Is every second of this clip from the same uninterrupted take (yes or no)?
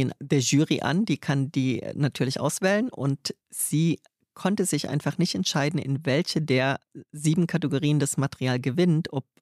yes